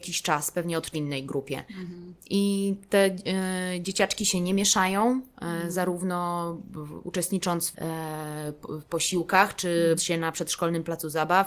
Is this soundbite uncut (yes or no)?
no